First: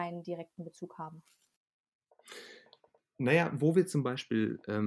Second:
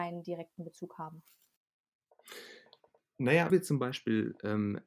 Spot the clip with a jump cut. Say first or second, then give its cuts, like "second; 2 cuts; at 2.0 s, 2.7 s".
second; 1 cut; at 3.5 s